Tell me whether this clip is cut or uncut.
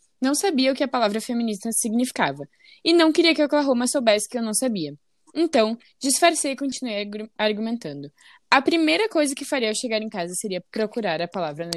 cut